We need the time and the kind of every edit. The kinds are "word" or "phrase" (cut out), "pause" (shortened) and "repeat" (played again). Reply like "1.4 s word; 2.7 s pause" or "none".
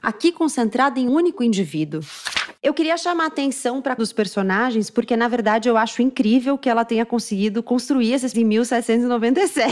1.1 s word; 4.0 s word; 8.3 s word